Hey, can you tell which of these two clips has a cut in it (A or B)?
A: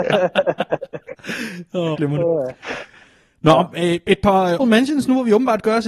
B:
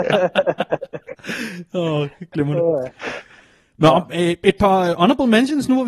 A